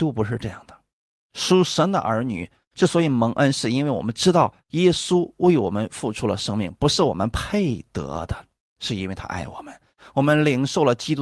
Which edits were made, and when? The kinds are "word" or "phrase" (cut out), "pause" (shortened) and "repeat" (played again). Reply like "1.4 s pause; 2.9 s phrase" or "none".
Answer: 0.9 s pause; 4.6 s pause